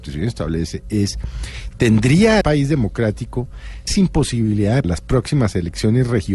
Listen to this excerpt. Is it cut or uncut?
cut